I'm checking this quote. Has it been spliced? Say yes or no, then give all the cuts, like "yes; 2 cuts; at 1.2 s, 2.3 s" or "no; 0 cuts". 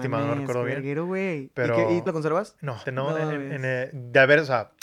yes; 2 cuts; at 2.1 s, 2.8 s